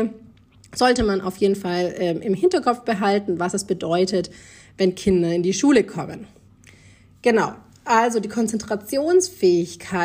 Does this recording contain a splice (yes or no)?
no